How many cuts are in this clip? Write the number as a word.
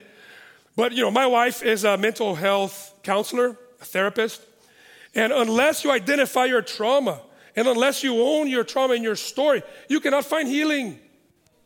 zero